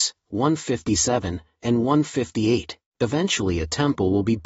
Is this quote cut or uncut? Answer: cut